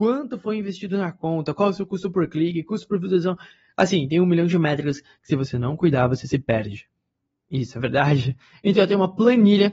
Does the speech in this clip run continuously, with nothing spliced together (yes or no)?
yes